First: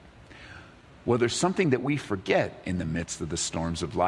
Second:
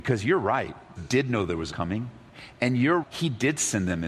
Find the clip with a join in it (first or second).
second